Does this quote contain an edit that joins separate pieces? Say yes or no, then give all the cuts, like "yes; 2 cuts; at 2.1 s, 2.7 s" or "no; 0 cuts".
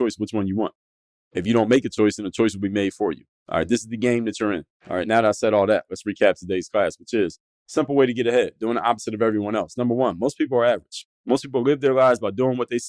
yes; 1 cut; at 4.8 s